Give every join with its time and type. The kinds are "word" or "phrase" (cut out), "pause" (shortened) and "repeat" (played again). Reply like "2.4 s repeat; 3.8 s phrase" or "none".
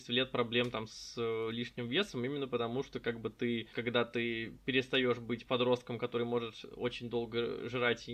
3.7 s word